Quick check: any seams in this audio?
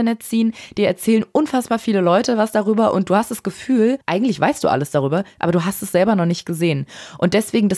yes; 1 cut; at 4.0 s

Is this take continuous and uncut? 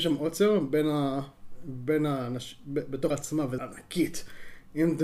no; 2 cuts; at 3.1 s, 3.6 s

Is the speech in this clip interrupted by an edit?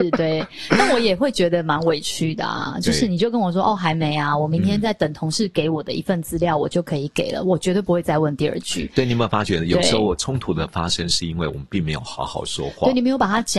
no; 0 cuts

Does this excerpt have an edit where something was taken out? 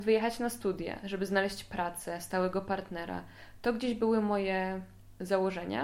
no; 0 cuts

